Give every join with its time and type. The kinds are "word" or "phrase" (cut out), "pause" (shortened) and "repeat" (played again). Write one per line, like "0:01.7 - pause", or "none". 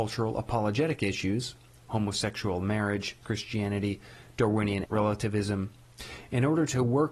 0:01.8 - word
0:03.2 - word
0:04.8 - word